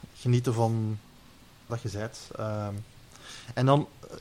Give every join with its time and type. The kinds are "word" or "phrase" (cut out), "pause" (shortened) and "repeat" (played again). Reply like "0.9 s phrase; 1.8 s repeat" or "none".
1.7 s word